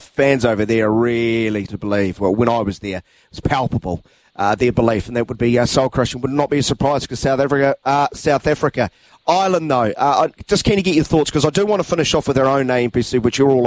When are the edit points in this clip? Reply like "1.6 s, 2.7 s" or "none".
1.7 s